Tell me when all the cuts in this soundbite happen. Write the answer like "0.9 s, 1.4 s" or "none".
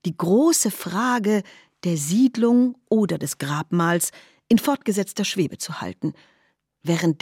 none